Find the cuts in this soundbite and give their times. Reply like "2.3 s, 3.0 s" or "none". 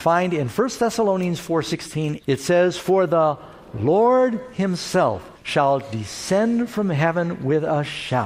2.2 s, 5.4 s